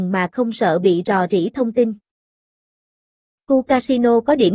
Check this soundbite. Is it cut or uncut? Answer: uncut